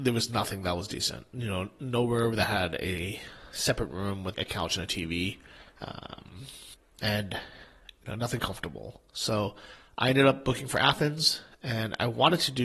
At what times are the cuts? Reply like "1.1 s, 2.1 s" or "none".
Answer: 4.3 s, 8.4 s